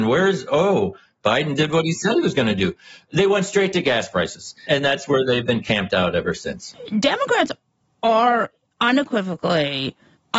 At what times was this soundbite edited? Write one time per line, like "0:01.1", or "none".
none

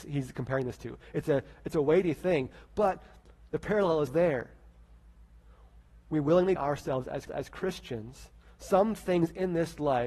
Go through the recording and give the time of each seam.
0:04.1
0:05.9
0:06.6
0:07.3

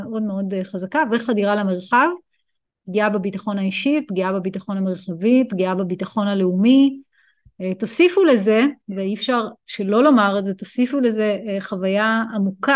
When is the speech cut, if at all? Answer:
none

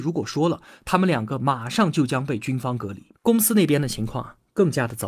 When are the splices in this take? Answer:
0:03.2

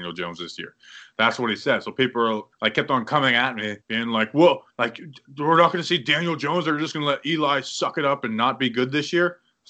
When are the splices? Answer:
0:02.5
0:03.8
0:04.7

